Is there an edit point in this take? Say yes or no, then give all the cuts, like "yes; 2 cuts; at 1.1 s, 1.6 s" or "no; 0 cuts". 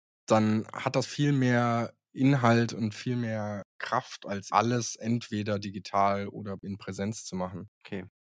yes; 3 cuts; at 1.0 s, 3.7 s, 4.5 s